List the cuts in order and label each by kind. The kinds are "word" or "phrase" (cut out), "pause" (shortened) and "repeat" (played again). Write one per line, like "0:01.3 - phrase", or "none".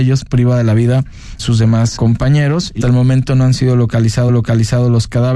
0:01.4 - word
0:02.0 - word
0:02.8 - word
0:04.3 - repeat